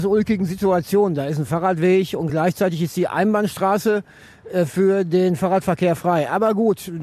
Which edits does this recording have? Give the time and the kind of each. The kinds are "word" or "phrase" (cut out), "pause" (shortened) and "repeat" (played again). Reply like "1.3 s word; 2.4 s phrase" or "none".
none